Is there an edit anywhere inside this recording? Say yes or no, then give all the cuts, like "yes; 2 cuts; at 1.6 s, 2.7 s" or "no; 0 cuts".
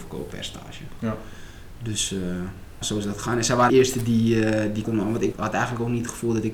yes; 4 cuts; at 2.8 s, 3.7 s, 4.8 s, 5.3 s